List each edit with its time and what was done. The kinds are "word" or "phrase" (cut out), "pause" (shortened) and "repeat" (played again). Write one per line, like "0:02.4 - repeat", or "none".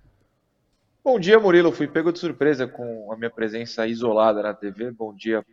none

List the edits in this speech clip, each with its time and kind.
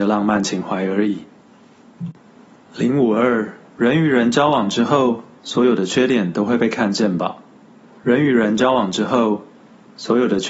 0:03.6 - pause
0:07.9 - pause

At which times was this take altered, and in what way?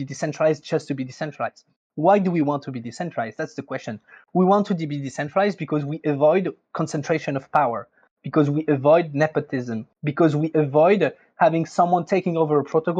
0:09.9 - pause

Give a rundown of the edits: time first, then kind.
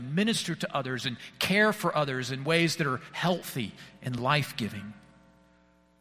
none

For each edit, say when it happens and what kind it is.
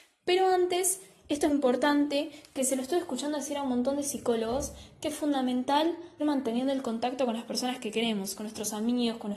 0:01.5 - word
0:06.2 - word

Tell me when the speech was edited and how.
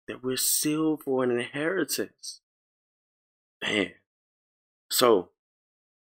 none

